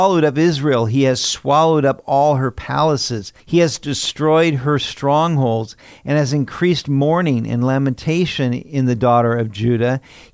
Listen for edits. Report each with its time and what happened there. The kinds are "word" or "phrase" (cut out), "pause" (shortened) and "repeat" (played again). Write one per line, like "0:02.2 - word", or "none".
0:03.4 - pause